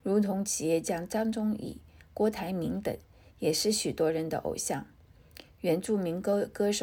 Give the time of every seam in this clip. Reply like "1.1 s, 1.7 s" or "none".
none